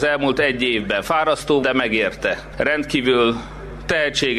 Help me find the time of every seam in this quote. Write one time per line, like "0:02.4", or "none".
0:01.6

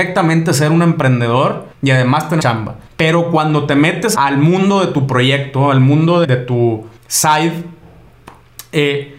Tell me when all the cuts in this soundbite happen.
0:01.7
0:02.4
0:02.9
0:04.1
0:06.2
0:07.0

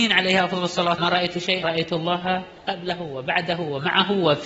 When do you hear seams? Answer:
0:01.0
0:01.6
0:02.6

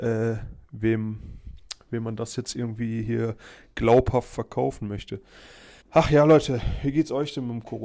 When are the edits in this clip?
0:05.8

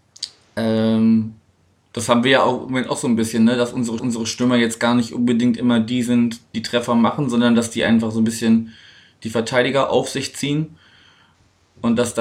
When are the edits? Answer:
0:04.0
0:06.5

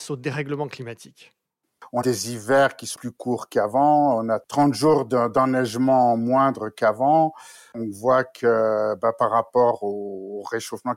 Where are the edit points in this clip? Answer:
0:02.0
0:02.9

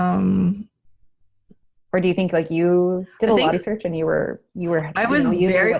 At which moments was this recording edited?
0:03.5

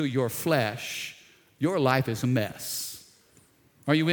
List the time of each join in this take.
none

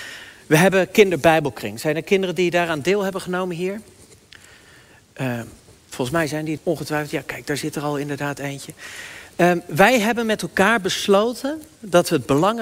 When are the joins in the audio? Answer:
0:06.6

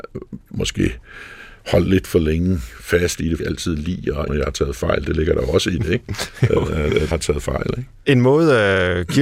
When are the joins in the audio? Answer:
0:03.4
0:04.3
0:07.1

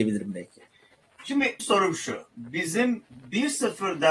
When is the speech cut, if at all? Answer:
0:01.6

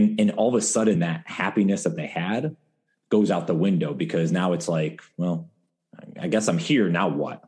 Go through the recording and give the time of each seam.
none

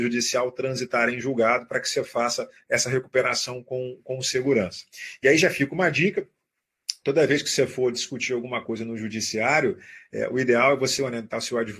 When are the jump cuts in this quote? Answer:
none

